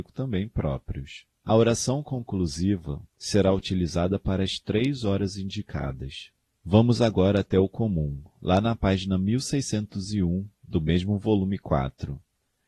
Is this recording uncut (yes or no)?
no